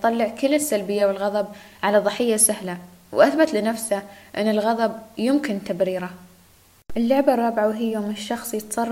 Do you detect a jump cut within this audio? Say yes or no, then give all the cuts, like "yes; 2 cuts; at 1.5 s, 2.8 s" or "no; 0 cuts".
no; 0 cuts